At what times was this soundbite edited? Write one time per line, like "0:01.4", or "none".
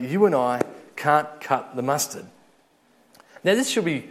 none